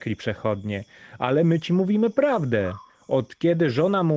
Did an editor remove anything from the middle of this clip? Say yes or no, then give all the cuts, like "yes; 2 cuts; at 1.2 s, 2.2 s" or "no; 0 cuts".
no; 0 cuts